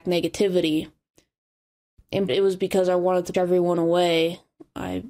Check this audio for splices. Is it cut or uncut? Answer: cut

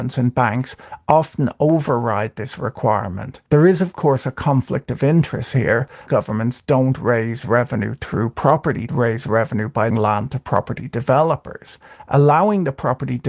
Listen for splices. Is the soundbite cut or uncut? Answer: cut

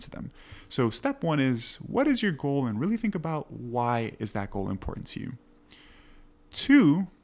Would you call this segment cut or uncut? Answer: uncut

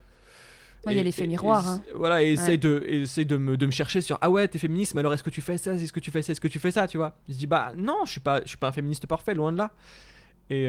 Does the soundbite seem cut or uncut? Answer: uncut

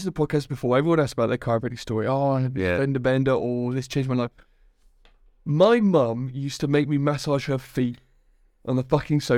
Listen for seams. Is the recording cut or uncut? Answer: uncut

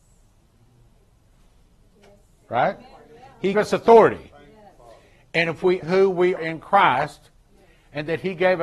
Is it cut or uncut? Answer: cut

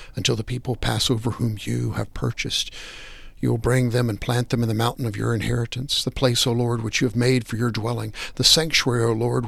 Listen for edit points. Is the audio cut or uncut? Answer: uncut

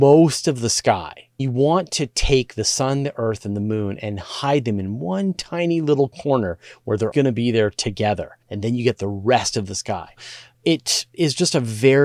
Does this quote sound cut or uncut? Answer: cut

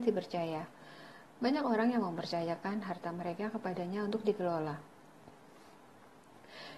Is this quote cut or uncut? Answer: uncut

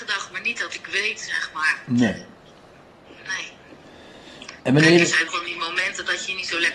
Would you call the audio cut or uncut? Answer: cut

